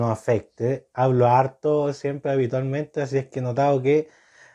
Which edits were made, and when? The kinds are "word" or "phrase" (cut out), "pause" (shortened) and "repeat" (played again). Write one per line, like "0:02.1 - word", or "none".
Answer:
none

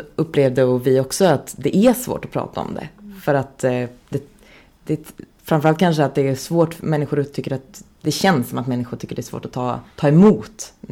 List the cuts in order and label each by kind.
0:05.3 - pause
0:09.9 - pause

